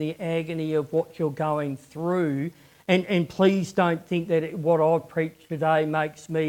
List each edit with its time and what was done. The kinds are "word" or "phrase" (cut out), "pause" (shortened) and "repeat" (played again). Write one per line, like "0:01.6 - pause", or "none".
none